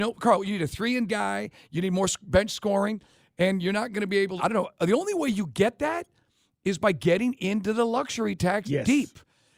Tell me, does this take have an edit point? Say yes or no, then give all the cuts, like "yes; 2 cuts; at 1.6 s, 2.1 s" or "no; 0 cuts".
yes; 2 cuts; at 1.1 s, 4.4 s